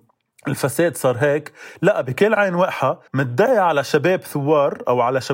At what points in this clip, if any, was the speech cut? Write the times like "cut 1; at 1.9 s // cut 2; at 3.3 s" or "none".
cut 1; at 3.1 s

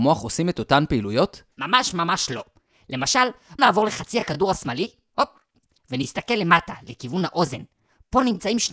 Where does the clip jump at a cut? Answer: cut 1; at 1.5 s // cut 2; at 3.6 s

